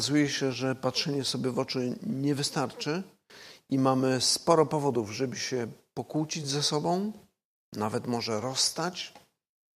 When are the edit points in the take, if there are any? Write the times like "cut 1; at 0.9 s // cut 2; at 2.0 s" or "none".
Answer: none